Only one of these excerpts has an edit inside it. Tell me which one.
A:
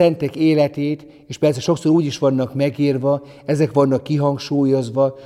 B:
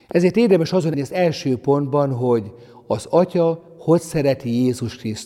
B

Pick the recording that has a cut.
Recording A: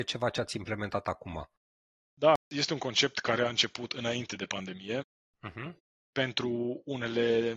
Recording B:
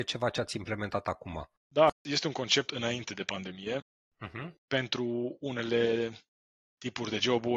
B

